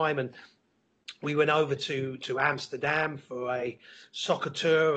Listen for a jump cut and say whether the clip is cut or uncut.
uncut